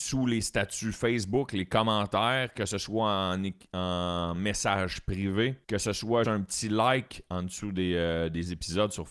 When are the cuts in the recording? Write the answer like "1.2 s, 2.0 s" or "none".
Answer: 5.6 s, 6.2 s